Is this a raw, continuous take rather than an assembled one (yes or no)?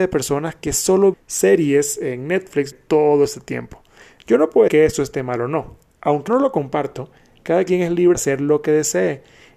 no